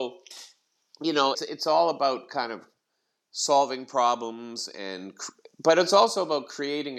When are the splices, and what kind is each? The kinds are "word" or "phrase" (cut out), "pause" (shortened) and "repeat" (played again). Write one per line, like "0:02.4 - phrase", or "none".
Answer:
0:01.3 - word